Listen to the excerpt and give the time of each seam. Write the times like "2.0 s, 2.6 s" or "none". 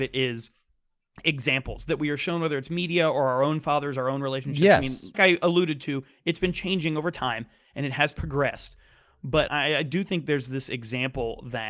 5.1 s, 9.5 s